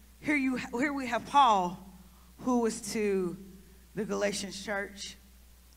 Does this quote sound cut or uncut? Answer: cut